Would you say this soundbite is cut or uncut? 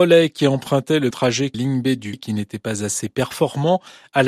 cut